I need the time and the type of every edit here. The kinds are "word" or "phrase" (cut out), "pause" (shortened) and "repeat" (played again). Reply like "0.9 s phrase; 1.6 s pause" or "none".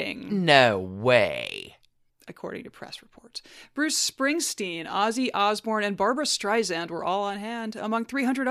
2.1 s pause

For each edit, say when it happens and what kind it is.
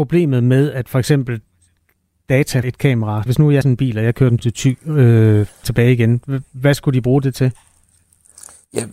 2.6 s word; 3.3 s word; 3.6 s word; 4.4 s word; 5.6 s word

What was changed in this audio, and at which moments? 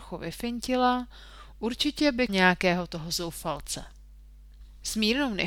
2.3 s word

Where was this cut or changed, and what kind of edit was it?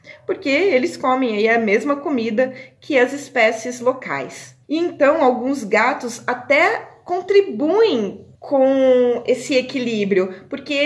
4.6 s pause; 8.3 s pause

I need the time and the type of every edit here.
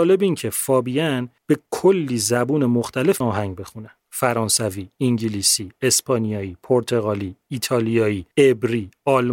1.4 s pause; 3.2 s word; 4.0 s pause; 8.3 s pause

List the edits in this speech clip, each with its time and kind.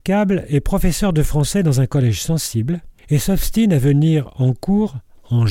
3.0 s pause

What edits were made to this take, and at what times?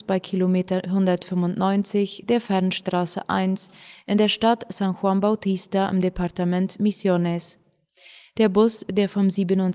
none

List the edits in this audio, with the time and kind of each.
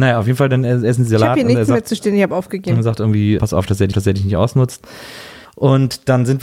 3.4 s word; 3.9 s repeat; 5.4 s pause

